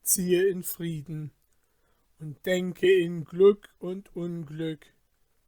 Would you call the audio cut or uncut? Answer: uncut